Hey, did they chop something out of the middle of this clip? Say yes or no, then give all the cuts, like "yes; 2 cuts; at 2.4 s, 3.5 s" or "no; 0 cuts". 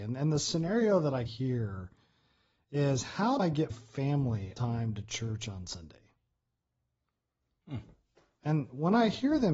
yes; 4 cuts; at 1.3 s, 3.4 s, 3.7 s, 4.6 s